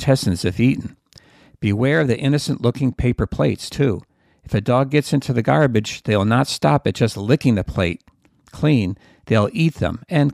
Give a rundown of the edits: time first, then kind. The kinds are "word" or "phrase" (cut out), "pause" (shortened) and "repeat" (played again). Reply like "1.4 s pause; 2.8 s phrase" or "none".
none